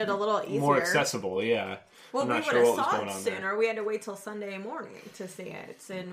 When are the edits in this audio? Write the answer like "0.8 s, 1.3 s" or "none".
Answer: none